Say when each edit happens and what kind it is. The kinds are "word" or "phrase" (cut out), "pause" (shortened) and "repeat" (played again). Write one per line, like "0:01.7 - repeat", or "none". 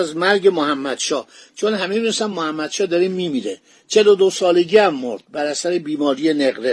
none